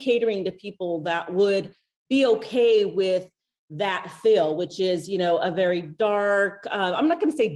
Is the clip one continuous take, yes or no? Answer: yes